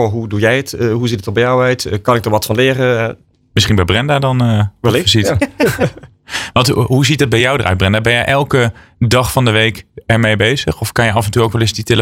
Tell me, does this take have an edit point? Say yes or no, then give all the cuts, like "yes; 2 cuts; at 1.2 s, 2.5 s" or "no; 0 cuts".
no; 0 cuts